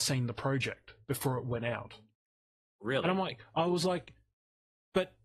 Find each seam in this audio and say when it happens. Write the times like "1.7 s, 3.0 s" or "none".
none